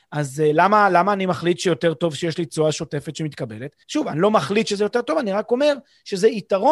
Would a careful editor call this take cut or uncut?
cut